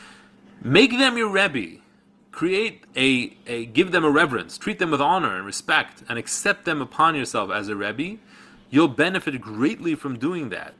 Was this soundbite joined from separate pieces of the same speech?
yes; 1 cut; at 2.9 s

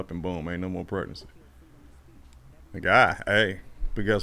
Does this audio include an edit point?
no; 0 cuts

